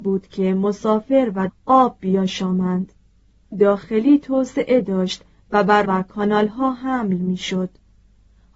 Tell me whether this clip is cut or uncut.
cut